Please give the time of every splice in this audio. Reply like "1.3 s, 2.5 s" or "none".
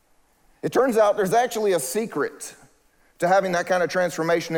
none